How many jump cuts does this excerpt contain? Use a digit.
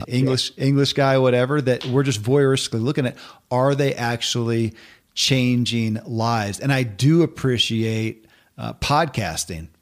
0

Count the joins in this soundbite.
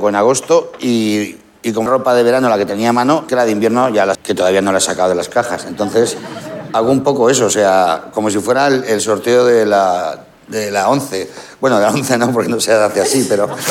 3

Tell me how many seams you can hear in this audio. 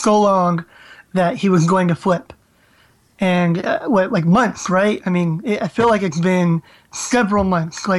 0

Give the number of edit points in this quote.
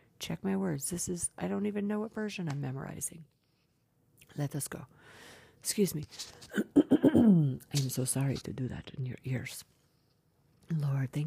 0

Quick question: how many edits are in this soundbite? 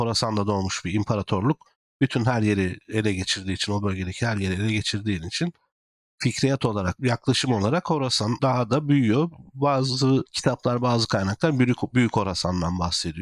0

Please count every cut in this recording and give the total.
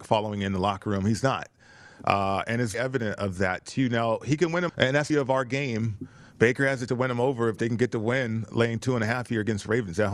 4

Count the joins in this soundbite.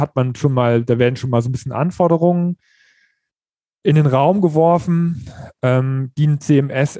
0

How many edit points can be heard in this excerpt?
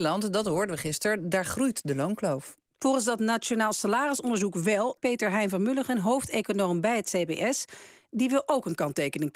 1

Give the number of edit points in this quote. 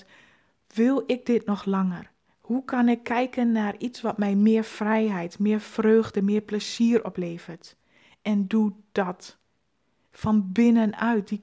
0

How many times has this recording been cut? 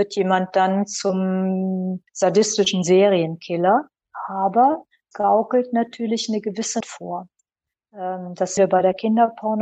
4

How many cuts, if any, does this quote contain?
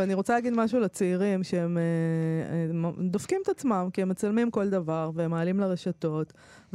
0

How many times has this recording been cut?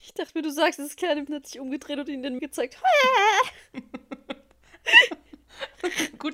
2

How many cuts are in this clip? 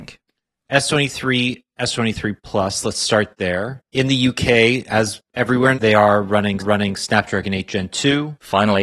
3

